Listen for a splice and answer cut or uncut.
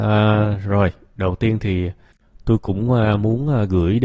uncut